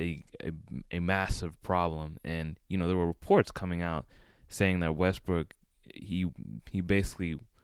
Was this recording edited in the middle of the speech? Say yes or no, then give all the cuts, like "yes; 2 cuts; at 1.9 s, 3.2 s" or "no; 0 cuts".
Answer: no; 0 cuts